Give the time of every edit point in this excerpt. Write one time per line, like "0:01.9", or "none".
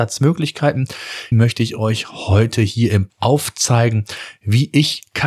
0:01.3
0:03.1